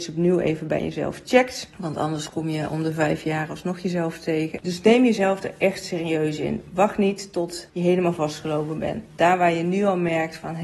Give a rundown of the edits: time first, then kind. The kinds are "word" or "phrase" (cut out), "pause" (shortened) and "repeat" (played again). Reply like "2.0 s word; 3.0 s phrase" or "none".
none